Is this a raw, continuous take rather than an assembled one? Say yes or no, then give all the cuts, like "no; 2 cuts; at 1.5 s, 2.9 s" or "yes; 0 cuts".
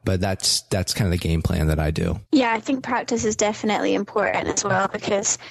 no; 1 cut; at 2.3 s